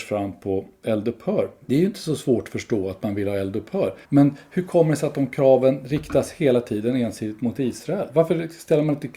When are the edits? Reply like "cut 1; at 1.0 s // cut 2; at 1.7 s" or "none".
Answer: cut 1; at 1.6 s // cut 2; at 4.0 s